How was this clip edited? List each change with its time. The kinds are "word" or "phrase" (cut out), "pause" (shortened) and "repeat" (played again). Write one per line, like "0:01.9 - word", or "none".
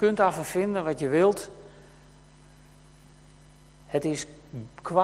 none